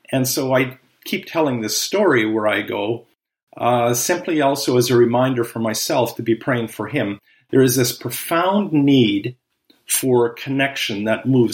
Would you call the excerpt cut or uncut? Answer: uncut